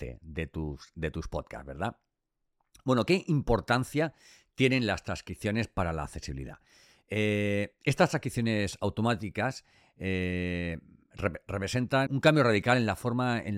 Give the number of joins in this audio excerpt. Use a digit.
1